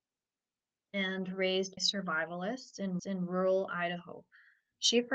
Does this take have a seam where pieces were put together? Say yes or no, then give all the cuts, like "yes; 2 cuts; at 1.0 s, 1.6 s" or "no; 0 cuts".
yes; 2 cuts; at 1.8 s, 3.0 s